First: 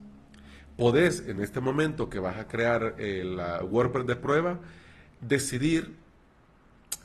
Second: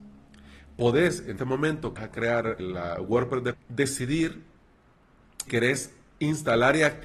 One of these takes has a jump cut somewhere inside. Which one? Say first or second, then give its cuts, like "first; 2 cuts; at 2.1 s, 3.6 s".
second; 5 cuts; at 1.4 s, 2.0 s, 2.6 s, 3.5 s, 5.5 s